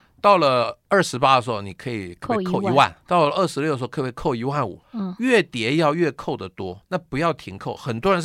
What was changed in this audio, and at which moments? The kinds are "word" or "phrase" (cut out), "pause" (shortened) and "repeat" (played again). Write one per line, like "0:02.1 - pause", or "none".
0:03.1 - word
0:04.8 - pause
0:06.8 - word